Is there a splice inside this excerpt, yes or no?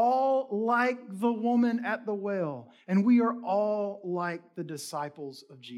no